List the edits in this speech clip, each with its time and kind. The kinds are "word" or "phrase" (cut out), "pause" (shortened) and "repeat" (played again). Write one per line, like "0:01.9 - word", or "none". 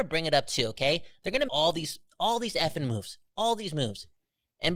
0:01.5 - word